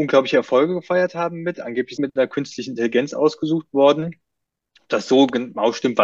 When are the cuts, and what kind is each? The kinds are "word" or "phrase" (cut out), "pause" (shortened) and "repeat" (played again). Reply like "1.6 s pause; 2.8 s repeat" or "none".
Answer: 2.0 s phrase